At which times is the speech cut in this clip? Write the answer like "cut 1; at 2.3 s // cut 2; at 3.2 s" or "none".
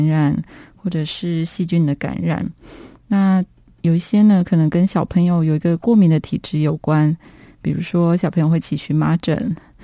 none

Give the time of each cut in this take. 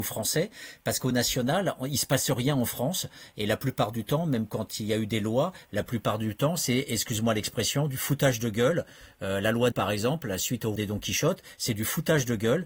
cut 1; at 1.1 s // cut 2; at 9.7 s // cut 3; at 10.8 s

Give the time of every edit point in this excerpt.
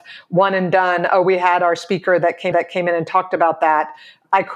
cut 1; at 2.5 s

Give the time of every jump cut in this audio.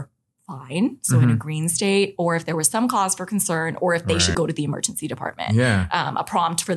cut 1; at 4.3 s

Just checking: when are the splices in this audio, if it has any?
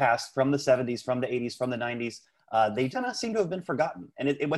cut 1; at 2.9 s

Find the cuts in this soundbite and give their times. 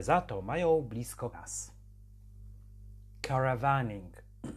cut 1; at 1.3 s

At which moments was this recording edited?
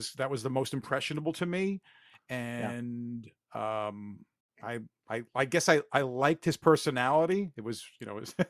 none

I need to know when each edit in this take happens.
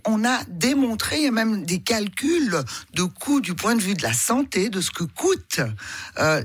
none

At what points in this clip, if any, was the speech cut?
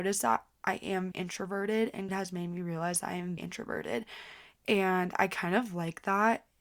cut 1; at 1.1 s // cut 2; at 2.1 s // cut 3; at 3.4 s

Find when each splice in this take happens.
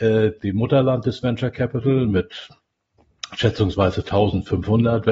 none

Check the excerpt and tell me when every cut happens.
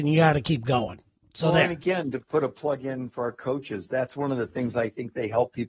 cut 1; at 1.2 s

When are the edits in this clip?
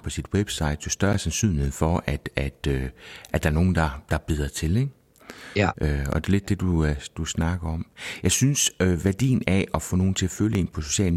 none

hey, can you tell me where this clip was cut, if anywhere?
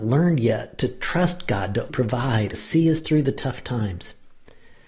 cut 1; at 1.9 s // cut 2; at 2.5 s

